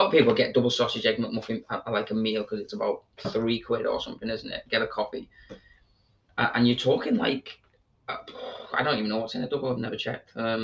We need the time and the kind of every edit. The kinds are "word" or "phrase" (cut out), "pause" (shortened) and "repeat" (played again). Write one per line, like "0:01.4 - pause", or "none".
none